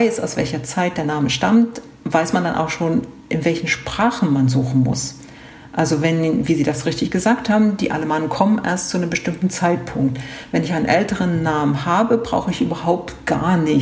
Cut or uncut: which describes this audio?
uncut